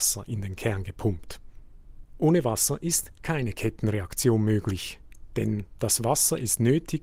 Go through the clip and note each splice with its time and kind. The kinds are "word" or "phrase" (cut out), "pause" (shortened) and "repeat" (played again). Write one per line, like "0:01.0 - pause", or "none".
none